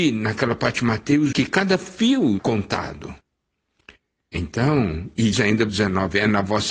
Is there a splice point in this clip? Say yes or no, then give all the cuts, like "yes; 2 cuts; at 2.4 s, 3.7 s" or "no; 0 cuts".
yes; 4 cuts; at 1.3 s, 2.4 s, 5.3 s, 5.7 s